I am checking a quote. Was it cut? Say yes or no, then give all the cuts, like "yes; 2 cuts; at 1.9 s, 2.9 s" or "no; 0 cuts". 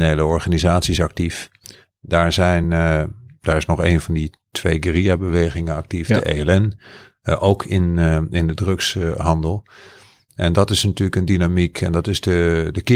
no; 0 cuts